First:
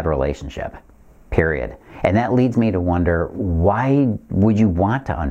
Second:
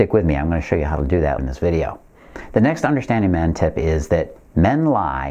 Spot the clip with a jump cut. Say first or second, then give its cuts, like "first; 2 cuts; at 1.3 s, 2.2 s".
second; 1 cut; at 1.4 s